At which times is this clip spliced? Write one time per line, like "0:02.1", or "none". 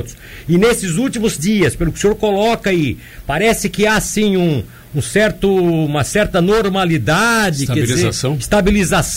0:01.4

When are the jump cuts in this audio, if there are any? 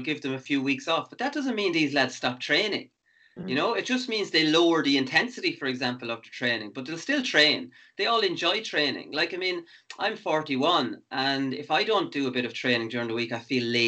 none

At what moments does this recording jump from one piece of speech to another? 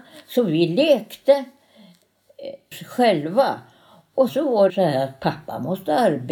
0:02.7
0:04.3
0:04.7

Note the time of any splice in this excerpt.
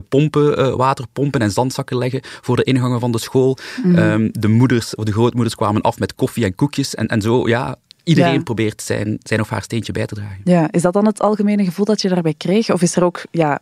none

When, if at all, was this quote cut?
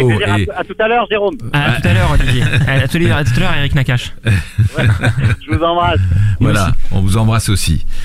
none

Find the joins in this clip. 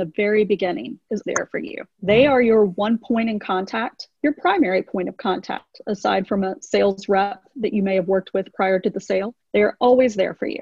0:01.2

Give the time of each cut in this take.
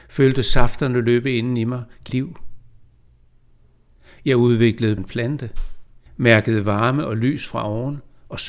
0:02.1
0:05.0
0:06.1

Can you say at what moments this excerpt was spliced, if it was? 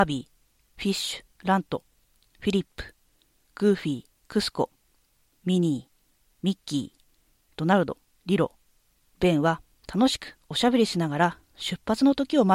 0:01.3
0:04.1
0:08.2

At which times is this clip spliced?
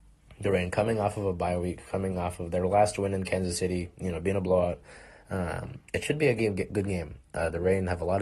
0:05.9

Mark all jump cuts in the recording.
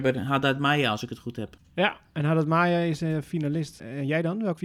none

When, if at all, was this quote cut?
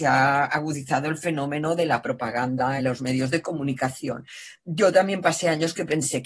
0:02.8

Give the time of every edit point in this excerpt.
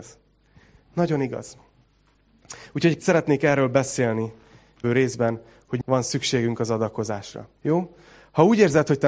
0:03.0
0:04.8
0:05.8
0:07.6

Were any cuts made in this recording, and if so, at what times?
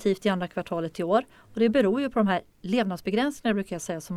none

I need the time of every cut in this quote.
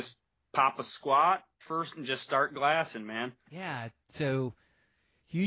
0:01.6
0:01.9
0:03.4

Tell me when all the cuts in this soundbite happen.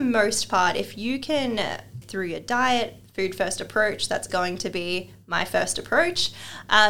0:02.0
0:04.3

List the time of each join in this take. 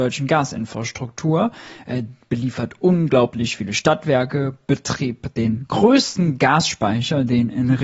none

